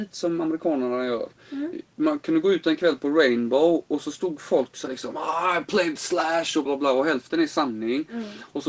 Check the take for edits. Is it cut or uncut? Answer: cut